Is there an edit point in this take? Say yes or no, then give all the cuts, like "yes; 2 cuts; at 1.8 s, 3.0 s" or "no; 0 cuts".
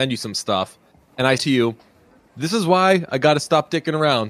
yes; 2 cuts; at 1.4 s, 2.3 s